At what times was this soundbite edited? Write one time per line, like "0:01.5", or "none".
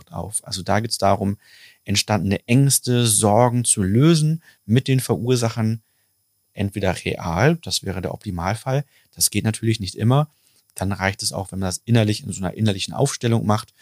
none